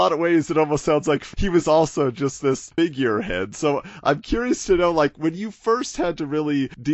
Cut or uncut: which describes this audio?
uncut